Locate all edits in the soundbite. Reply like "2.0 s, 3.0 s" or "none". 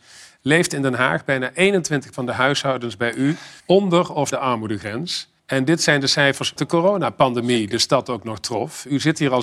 2.1 s, 3.6 s, 4.3 s, 5.4 s, 6.6 s